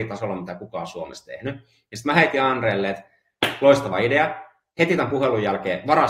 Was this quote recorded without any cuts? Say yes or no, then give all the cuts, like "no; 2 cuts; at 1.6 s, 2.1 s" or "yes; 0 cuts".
yes; 0 cuts